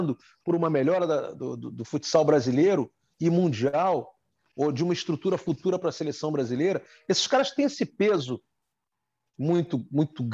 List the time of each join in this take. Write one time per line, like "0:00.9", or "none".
none